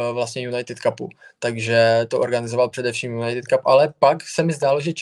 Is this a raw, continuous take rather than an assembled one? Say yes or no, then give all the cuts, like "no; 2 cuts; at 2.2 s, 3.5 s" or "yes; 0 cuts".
yes; 0 cuts